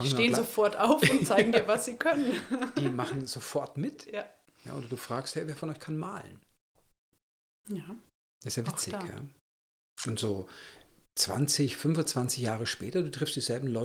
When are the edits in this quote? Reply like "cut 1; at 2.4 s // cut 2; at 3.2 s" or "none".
none